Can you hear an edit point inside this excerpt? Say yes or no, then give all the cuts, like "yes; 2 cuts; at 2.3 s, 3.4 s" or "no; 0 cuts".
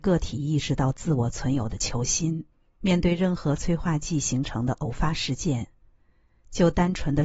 yes; 1 cut; at 2.5 s